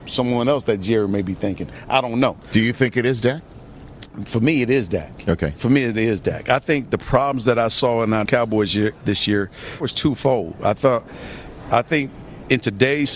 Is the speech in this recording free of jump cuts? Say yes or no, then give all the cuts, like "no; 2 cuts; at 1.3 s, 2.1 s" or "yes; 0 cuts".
no; 2 cuts; at 8.3 s, 9.8 s